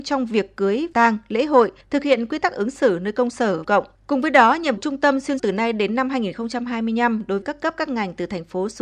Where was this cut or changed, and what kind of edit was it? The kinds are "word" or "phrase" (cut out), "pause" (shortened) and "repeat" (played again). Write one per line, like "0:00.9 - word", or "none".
0:00.9 - word
0:01.8 - pause
0:03.6 - phrase
0:03.9 - pause
0:04.8 - word
0:05.4 - word
0:07.4 - word